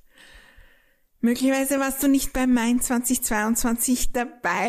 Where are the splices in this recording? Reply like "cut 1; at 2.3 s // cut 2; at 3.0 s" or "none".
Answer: none